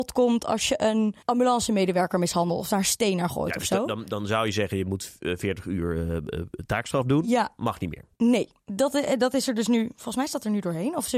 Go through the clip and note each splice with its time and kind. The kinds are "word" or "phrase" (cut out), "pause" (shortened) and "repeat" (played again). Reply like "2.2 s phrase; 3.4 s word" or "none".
1.2 s pause; 8.1 s pause